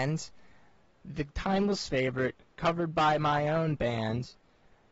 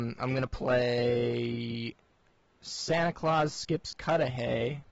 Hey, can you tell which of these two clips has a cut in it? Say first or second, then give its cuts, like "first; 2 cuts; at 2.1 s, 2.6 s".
second; 1 cut; at 2.4 s